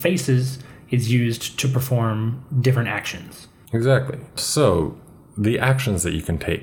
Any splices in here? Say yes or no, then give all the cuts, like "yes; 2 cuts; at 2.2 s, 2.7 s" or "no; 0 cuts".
no; 0 cuts